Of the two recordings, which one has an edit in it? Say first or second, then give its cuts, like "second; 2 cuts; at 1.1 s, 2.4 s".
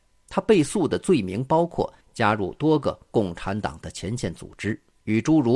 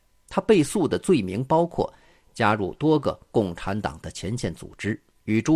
first; 1 cut; at 2.0 s